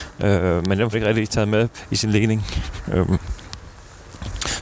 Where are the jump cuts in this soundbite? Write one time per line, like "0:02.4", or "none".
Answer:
0:00.9